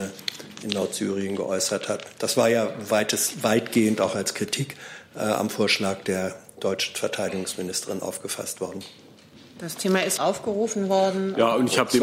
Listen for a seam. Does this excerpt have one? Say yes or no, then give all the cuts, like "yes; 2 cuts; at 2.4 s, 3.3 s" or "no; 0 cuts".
yes; 1 cut; at 10.2 s